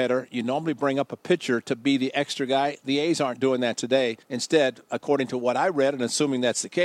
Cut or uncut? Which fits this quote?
cut